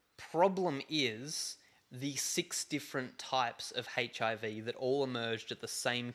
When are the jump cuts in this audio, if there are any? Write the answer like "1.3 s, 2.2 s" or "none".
none